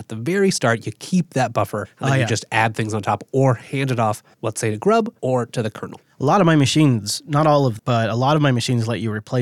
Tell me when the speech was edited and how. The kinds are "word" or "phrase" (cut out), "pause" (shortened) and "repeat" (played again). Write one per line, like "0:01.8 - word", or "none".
0:01.8 - word
0:04.3 - pause
0:05.2 - pause
0:07.8 - word